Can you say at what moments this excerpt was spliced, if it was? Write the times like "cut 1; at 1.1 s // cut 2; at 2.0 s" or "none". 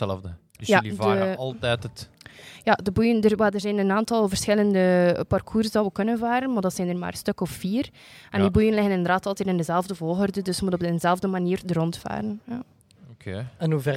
none